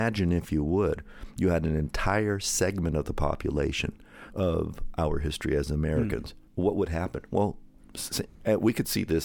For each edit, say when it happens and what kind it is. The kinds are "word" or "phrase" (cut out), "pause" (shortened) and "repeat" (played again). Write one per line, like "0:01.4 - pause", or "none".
0:04.3 - phrase
0:06.5 - pause